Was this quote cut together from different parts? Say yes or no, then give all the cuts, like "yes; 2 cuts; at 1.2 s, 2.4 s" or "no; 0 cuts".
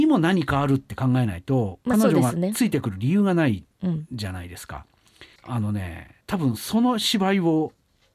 yes; 2 cuts; at 5.4 s, 6.2 s